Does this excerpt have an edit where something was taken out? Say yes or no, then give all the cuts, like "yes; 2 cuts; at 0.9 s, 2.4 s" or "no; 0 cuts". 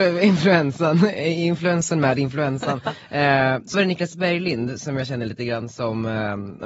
yes; 1 cut; at 3.7 s